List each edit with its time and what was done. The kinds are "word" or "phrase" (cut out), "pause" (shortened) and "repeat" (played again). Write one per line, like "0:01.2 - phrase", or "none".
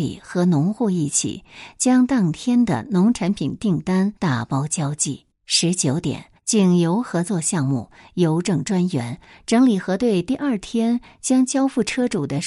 0:04.2 - pause
0:05.3 - pause
0:06.4 - pause